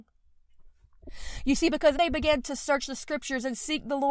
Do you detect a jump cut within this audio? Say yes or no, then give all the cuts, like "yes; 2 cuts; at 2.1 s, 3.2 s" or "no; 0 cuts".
yes; 1 cut; at 1.9 s